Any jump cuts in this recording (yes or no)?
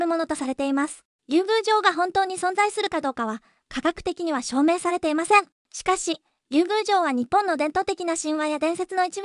no